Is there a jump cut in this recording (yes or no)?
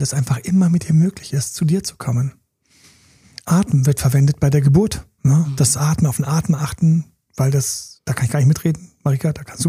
no